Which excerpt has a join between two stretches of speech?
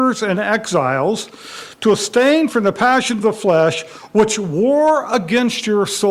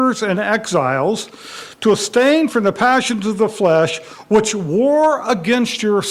first; 1 cut; at 3.2 s

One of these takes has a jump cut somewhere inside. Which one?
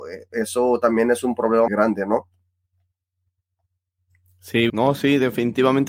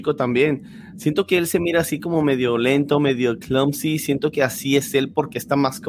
first; 2 cuts; at 1.7 s, 4.7 s

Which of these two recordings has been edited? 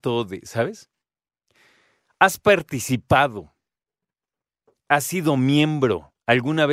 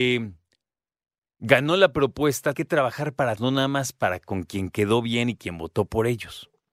second; 2 cuts; at 2.5 s, 3.4 s

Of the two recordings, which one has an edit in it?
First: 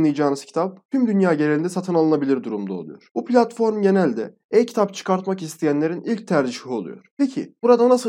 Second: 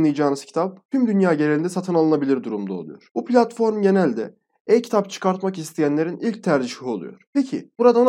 first; 1 cut; at 4.4 s

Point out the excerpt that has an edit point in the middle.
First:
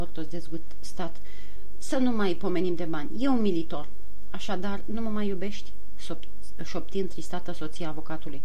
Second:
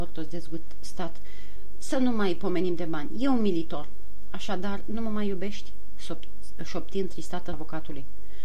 second; 1 cut; at 7.5 s

